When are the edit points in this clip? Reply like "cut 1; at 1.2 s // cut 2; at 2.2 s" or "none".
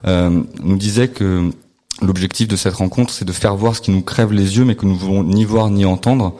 none